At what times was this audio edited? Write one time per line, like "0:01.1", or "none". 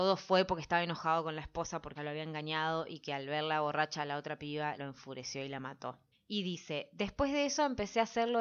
0:02.0
0:04.8
0:06.1